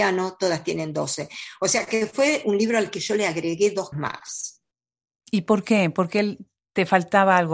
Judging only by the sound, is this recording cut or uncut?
cut